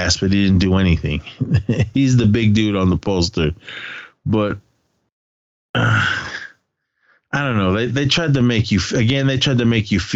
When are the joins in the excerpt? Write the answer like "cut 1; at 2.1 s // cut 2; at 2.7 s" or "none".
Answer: none